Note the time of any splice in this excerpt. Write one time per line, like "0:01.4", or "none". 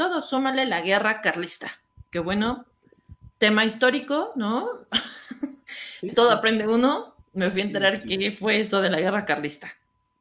0:03.3
0:06.1